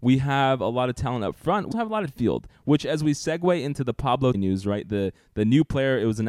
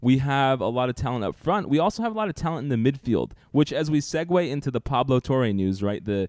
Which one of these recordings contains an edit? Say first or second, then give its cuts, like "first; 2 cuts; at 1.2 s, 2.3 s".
first; 3 cuts; at 1.7 s, 2.1 s, 4.3 s